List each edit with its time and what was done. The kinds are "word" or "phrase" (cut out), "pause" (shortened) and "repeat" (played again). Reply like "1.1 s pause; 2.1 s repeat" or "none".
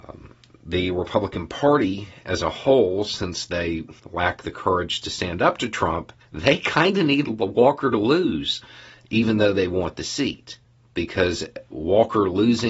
4.0 s pause; 6.2 s pause; 10.6 s pause